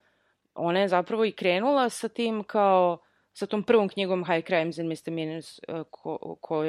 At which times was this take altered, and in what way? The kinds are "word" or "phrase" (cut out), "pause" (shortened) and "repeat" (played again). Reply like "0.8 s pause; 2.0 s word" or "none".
none